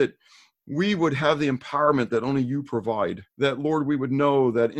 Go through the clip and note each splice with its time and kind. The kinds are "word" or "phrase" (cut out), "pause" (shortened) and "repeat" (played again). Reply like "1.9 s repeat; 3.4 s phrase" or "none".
3.3 s pause